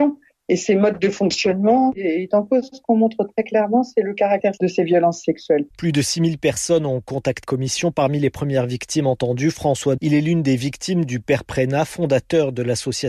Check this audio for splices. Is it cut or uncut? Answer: cut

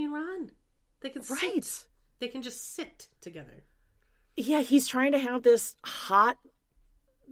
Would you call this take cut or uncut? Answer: uncut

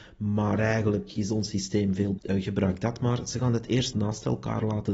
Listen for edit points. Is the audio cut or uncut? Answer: cut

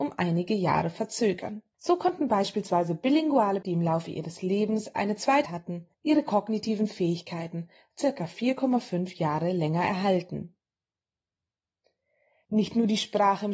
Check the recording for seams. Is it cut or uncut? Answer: cut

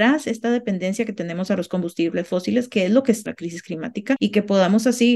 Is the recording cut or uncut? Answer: cut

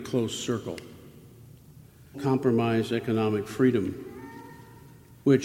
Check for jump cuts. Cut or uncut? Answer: cut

